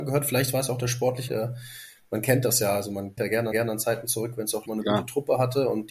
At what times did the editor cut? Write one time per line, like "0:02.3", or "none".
0:01.3
0:03.2
0:03.5
0:04.7